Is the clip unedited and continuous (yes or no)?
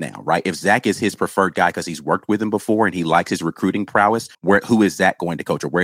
no